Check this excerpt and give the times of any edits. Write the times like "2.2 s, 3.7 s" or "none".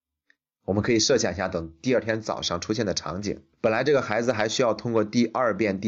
3.5 s